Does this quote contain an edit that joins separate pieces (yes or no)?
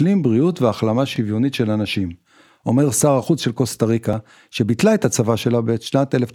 no